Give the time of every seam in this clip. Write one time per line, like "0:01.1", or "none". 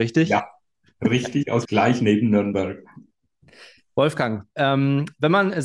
0:01.6